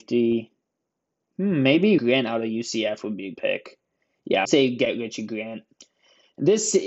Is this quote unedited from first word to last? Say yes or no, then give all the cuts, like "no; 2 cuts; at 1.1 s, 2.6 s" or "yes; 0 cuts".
no; 3 cuts; at 2.0 s, 3.3 s, 4.4 s